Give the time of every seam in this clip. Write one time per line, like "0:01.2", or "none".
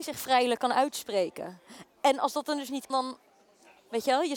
0:02.9

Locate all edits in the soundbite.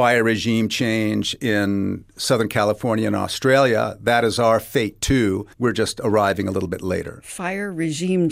0:05.5

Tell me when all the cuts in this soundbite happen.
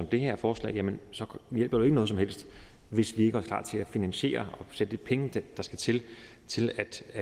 none

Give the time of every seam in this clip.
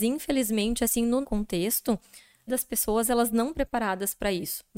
0:01.2
0:02.5
0:03.5

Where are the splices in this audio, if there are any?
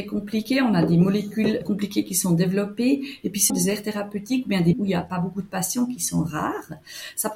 0:01.6
0:03.5
0:04.7

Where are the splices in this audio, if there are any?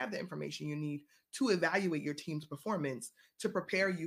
none

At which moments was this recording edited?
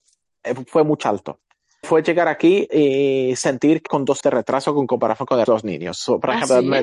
0:01.0
0:01.8
0:02.7
0:03.9
0:04.2
0:05.5

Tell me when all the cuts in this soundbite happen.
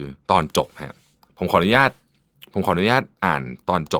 none

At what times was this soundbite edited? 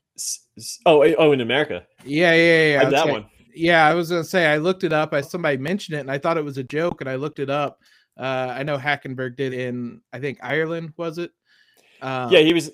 0:02.9
0:05.2
0:09.5

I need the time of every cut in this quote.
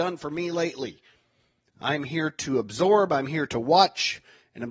none

